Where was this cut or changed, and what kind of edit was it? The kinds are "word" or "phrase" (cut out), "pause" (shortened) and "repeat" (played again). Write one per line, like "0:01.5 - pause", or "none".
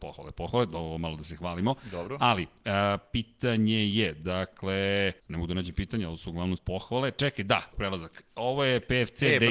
0:05.2 - pause
0:06.6 - word
0:07.7 - word